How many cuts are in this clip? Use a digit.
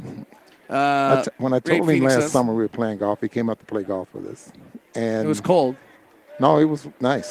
0